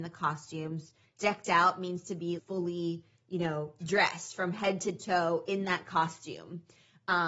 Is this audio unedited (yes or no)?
no